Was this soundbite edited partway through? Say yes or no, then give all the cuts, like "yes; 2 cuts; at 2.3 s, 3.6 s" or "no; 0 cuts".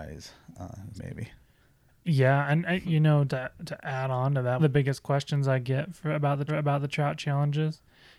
yes; 4 cuts; at 0.9 s, 3.3 s, 4.6 s, 6.5 s